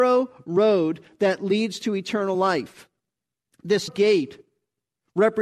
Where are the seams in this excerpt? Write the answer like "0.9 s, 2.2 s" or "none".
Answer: 3.9 s